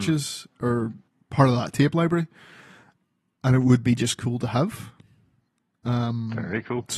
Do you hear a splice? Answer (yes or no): no